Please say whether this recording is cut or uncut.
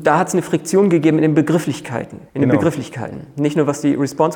cut